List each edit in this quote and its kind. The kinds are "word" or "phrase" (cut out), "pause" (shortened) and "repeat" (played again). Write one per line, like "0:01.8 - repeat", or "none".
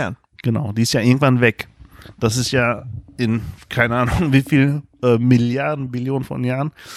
none